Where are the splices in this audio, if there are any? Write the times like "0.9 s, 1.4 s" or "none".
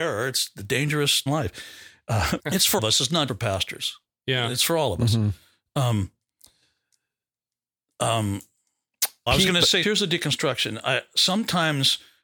1.3 s, 2.4 s, 2.8 s, 3.3 s, 9.3 s, 9.8 s